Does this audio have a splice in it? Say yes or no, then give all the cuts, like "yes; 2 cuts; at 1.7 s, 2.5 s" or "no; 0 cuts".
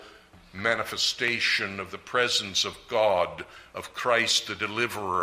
no; 0 cuts